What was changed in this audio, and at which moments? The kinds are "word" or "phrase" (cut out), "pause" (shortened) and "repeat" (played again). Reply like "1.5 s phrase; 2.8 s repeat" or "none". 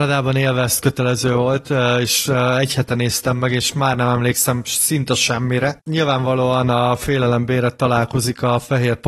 none